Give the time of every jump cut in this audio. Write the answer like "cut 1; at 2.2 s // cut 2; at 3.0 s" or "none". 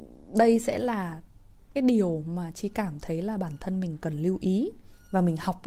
cut 1; at 1.8 s